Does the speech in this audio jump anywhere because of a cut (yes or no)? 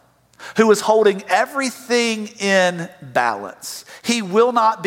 no